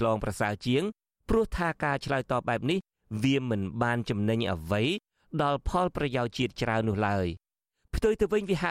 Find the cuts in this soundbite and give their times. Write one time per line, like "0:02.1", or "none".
none